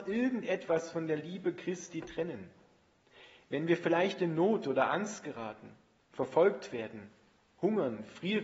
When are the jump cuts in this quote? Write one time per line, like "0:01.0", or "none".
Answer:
none

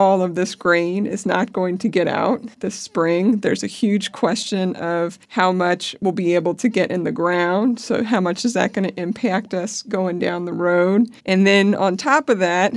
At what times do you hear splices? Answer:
0:02.5
0:05.2
0:11.2

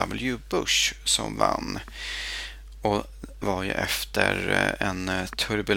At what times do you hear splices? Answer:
0:03.4

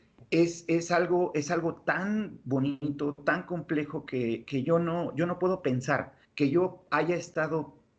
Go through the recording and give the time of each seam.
0:06.2

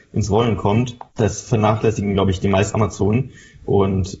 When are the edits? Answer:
0:01.1
0:02.7

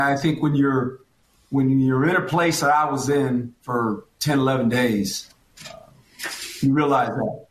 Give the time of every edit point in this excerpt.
0:01.2

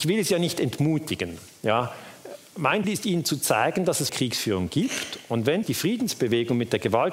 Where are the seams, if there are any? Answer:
0:02.8
0:04.1
0:05.6

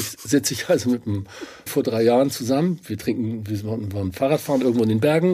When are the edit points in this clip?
0:01.7

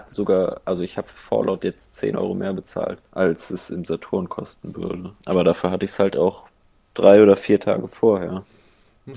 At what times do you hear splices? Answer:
0:03.1
0:05.2

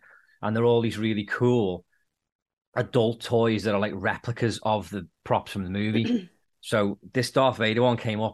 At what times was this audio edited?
0:05.1

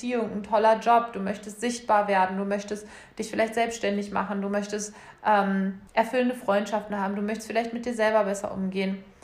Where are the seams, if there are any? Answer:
0:05.9

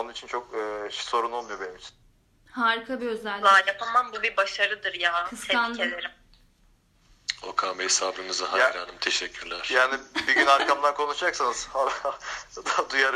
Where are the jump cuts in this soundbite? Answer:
0:02.0

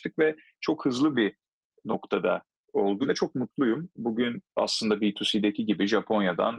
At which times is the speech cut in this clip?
0:01.1
0:03.0
0:04.5

